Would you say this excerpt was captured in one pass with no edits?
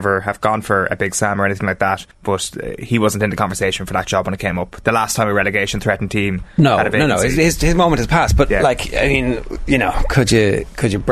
no; 1 cut; at 2.1 s

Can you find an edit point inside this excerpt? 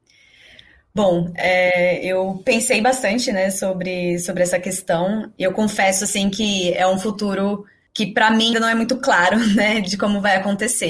yes; 1 cut; at 8.5 s

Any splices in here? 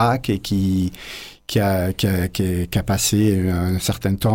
no; 0 cuts

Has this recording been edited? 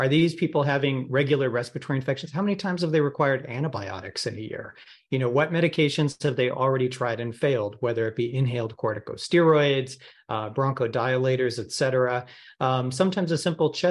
no; 0 cuts

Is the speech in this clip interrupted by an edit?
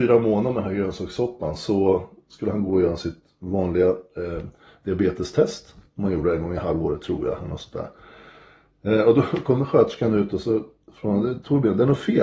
no; 0 cuts

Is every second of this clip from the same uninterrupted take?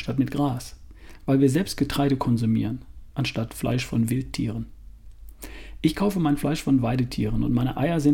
yes; 0 cuts

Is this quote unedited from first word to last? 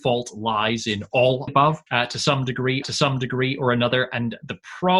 no; 3 cuts; at 1.5 s, 1.9 s, 2.8 s

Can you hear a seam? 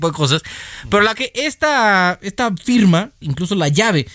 yes; 2 cuts; at 1.1 s, 3.2 s

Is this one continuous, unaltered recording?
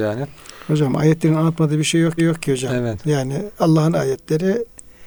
no; 1 cut; at 2.2 s

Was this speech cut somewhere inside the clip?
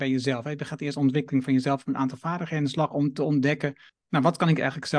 yes; 1 cut; at 3.9 s

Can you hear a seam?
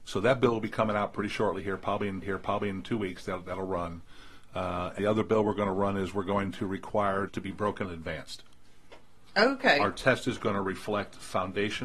yes; 4 cuts; at 2.2 s, 5.0 s, 7.3 s, 7.8 s

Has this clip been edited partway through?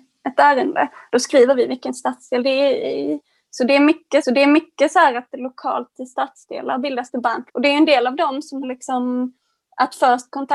yes; 3 cuts; at 4.2 s, 7.5 s, 8.6 s

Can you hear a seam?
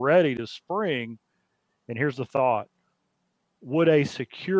no; 0 cuts

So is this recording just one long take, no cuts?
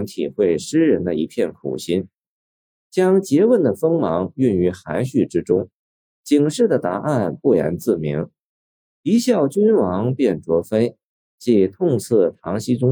yes; 0 cuts

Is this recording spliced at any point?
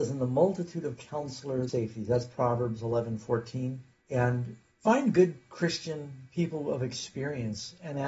yes; 1 cut; at 1.7 s

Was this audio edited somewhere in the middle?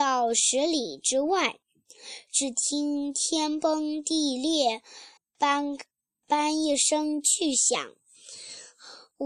yes; 1 cut; at 5.2 s

